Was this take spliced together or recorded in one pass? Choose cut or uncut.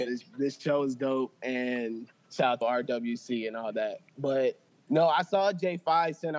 cut